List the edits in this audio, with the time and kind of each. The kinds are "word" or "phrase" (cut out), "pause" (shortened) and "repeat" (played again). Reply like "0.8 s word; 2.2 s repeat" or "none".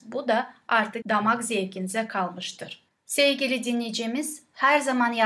1.0 s word